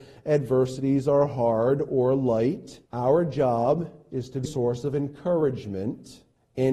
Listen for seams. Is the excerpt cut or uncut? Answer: cut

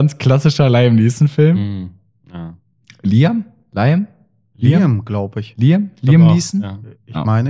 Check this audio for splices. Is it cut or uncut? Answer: uncut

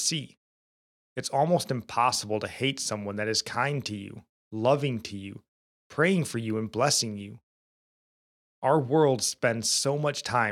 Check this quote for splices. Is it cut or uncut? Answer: uncut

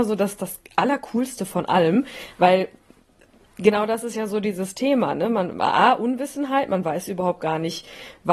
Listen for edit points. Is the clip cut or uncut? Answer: uncut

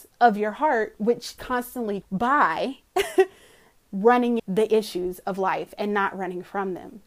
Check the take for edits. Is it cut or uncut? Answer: cut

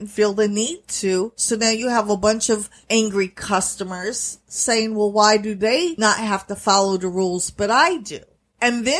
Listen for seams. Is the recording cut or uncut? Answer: uncut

